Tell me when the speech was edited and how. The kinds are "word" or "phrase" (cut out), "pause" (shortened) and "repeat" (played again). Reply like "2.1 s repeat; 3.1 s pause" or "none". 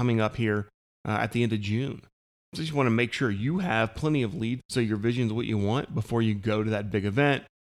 4.6 s word

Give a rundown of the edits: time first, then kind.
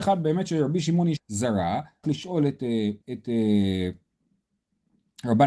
1.2 s word; 2.0 s word; 3.0 s pause

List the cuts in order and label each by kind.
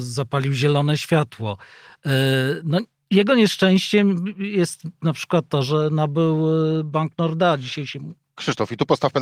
none

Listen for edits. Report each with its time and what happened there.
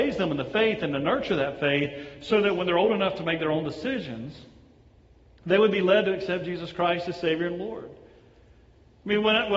none

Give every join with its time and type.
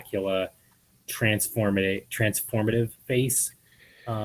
3.0 s pause

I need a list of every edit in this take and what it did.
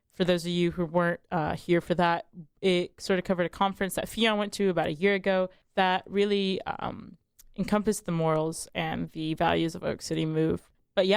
1.2 s pause

